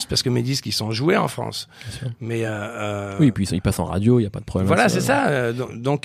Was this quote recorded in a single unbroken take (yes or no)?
yes